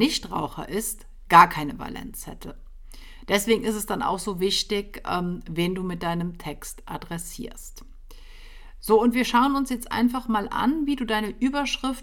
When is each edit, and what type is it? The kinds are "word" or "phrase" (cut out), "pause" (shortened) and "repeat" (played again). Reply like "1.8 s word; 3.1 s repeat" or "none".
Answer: none